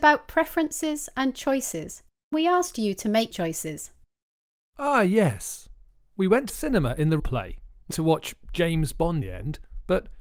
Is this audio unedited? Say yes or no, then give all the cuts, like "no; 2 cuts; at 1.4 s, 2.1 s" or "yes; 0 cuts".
no; 6 cuts; at 2.3 s, 3.3 s, 6.5 s, 7.2 s, 7.9 s, 9.2 s